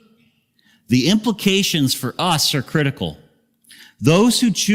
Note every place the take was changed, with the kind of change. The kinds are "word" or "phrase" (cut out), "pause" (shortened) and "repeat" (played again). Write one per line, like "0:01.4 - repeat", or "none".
none